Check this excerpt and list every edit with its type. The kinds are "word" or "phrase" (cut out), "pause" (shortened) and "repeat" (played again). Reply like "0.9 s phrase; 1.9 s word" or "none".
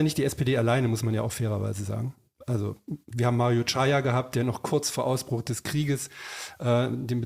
none